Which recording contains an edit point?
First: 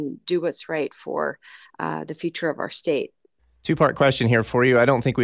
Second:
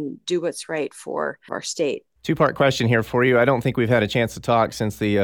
second; 2 cuts; at 1.5 s, 2.2 s

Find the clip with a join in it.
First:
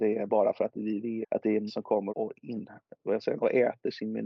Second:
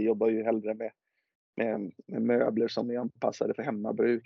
first; 4 cuts; at 1.2 s, 1.7 s, 2.1 s, 3.4 s

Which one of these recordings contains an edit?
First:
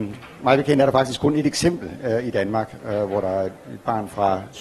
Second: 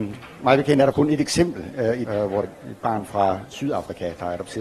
second; 3 cuts; at 0.9 s, 2.1 s, 2.4 s

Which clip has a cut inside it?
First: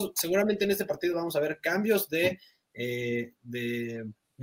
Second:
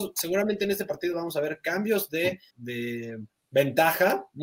second; 1 cut; at 2.5 s

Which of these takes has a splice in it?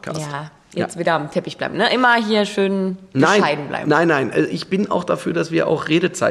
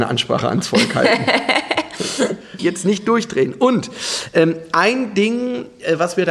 second; 1 cut; at 2.6 s

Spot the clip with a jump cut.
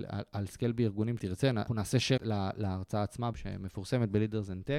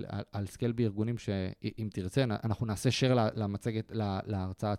first; 4 cuts; at 1.2 s, 1.7 s, 2.2 s, 3.3 s

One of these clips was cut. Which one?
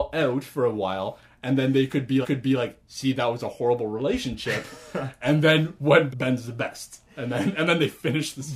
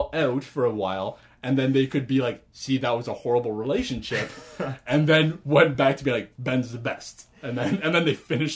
first; 2 cuts; at 2.2 s, 6.1 s

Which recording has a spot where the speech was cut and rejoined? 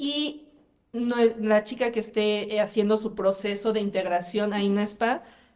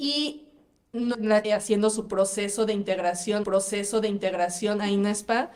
second; 3 cuts; at 1.1 s, 1.4 s, 3.4 s

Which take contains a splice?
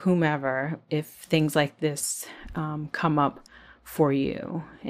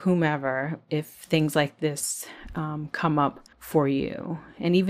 second; 1 cut; at 3.5 s

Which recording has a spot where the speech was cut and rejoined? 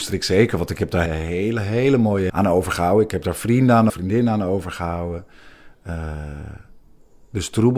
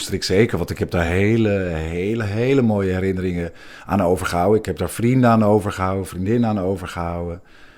first; 3 cuts; at 1.1 s, 2.3 s, 3.9 s

